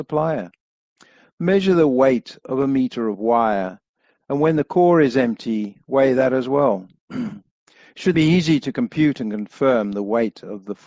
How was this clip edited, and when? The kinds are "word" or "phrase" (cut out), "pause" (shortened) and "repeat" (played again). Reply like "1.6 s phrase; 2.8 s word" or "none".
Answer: 8.1 s word